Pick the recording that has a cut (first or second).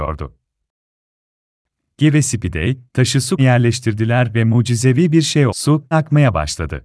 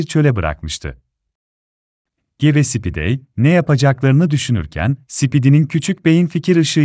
first